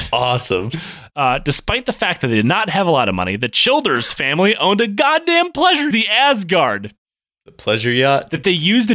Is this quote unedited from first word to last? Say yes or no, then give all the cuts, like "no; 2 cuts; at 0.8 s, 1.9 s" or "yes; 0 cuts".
no; 1 cut; at 5.9 s